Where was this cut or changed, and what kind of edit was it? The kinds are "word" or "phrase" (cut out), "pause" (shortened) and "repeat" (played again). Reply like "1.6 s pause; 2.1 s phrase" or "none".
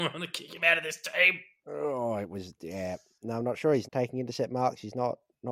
3.8 s word